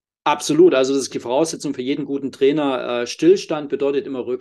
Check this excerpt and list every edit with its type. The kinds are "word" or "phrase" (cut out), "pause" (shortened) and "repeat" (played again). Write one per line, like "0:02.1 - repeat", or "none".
0:01.1 - word